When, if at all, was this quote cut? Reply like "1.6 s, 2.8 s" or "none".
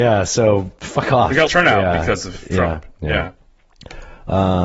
1.5 s